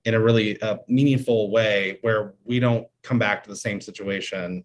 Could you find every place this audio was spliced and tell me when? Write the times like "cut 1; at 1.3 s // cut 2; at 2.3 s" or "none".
none